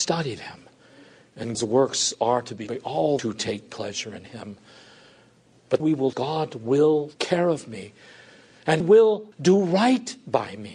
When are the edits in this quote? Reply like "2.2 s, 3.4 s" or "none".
1.5 s, 2.7 s, 3.2 s, 5.8 s, 6.1 s, 7.1 s, 8.8 s, 9.3 s